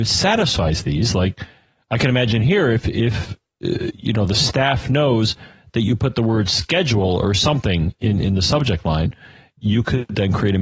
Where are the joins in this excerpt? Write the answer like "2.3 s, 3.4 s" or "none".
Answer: none